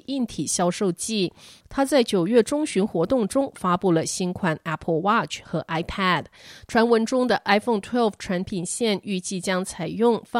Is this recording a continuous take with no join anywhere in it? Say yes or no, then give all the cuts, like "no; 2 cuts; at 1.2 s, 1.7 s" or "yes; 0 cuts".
yes; 0 cuts